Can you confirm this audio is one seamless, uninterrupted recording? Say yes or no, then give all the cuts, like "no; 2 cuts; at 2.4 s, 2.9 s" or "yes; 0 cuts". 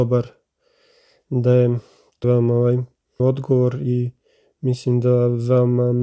no; 2 cuts; at 2.2 s, 3.2 s